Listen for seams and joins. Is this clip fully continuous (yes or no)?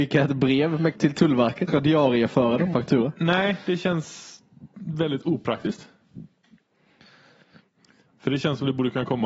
no